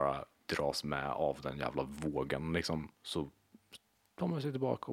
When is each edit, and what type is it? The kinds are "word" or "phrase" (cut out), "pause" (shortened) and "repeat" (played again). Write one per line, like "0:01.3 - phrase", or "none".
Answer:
none